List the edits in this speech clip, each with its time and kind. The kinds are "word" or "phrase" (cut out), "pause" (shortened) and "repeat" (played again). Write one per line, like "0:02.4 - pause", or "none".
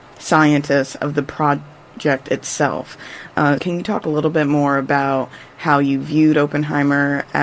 0:03.6 - word